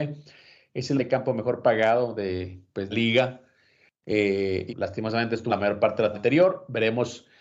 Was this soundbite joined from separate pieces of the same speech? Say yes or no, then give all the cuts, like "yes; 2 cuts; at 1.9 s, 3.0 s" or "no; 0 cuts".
yes; 5 cuts; at 1.0 s, 2.9 s, 4.7 s, 5.5 s, 6.1 s